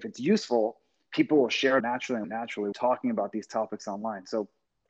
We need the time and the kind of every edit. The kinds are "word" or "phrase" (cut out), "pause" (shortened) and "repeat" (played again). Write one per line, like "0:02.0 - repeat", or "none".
0:01.8 - word
0:02.2 - phrase
0:02.7 - phrase